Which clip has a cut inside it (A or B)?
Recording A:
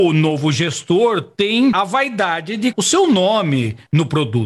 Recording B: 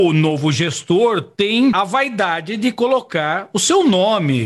A